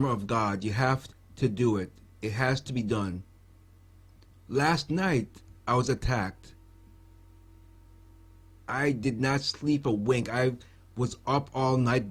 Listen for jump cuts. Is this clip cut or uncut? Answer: uncut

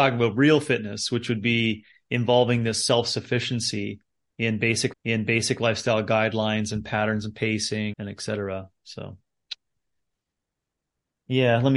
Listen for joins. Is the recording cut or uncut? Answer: cut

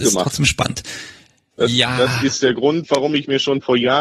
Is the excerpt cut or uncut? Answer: uncut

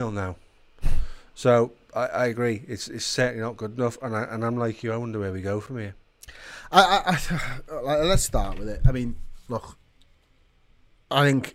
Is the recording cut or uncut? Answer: uncut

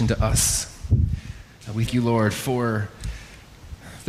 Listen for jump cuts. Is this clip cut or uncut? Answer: cut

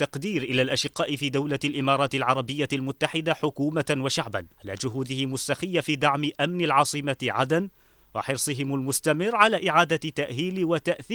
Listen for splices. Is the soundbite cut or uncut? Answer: cut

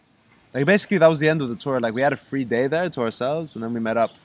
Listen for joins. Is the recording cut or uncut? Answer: uncut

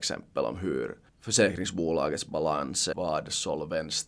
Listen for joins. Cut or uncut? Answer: cut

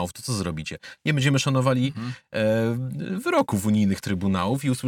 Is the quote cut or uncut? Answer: uncut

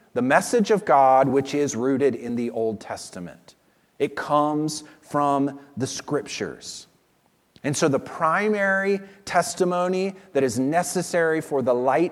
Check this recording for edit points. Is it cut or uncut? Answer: uncut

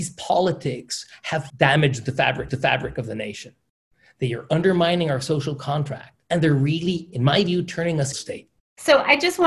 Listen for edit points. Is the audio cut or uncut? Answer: cut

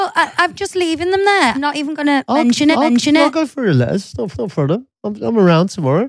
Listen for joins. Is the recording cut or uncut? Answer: cut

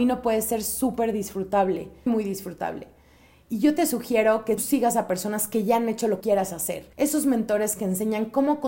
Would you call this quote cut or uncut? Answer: cut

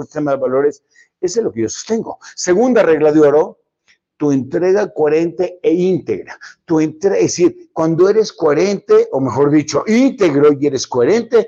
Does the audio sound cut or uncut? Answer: uncut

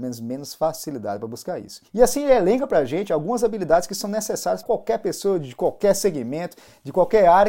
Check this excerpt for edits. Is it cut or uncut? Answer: cut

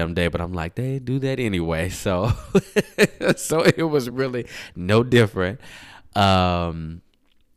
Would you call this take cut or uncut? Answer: uncut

